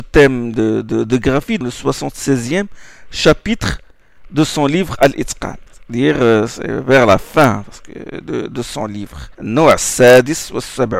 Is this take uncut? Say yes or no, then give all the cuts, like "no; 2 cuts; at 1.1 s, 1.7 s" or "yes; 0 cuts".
no; 3 cuts; at 1.6 s, 5.7 s, 9.3 s